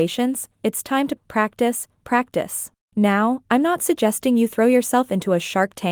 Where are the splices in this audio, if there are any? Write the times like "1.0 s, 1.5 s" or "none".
1.2 s, 2.8 s